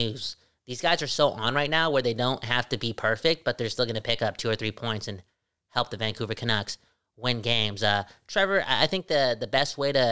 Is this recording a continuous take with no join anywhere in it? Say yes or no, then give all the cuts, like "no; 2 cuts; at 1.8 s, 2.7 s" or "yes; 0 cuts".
yes; 0 cuts